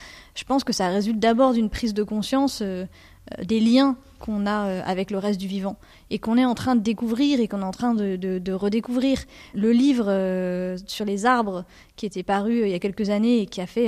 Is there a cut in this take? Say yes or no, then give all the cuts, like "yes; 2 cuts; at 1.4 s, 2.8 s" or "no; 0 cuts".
no; 0 cuts